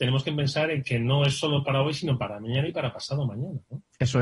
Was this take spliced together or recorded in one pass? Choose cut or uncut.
uncut